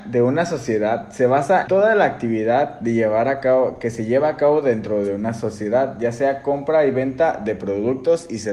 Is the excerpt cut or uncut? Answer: cut